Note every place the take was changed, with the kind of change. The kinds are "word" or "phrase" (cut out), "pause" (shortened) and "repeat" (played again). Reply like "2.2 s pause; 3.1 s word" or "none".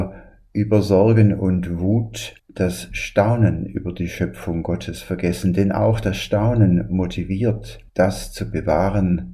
2.4 s pause; 7.9 s pause